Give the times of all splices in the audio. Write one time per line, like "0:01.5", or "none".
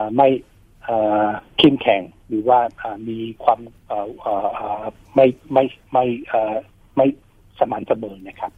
0:01.5
0:05.0
0:06.7